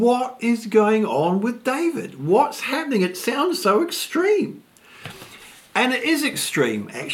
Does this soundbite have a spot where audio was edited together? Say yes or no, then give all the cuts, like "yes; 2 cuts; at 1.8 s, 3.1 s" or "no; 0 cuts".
no; 0 cuts